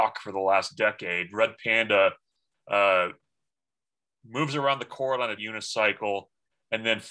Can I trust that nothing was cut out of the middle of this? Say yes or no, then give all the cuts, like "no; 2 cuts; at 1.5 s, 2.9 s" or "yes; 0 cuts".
no; 1 cut; at 5.4 s